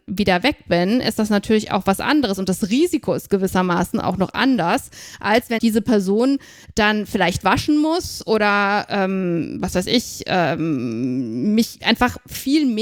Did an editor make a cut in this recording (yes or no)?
yes